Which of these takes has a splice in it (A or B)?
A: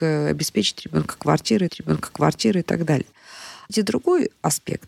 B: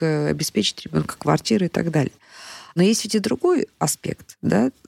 A